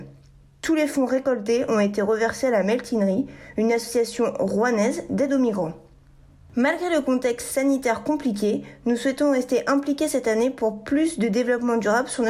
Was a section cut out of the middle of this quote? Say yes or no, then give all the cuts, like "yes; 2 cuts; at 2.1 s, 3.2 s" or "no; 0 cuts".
no; 0 cuts